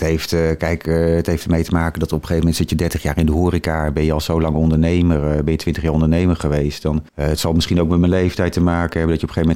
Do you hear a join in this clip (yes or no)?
yes